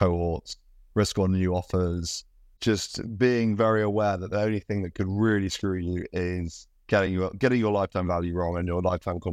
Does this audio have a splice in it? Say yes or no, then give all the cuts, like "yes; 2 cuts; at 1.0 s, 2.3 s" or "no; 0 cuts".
no; 0 cuts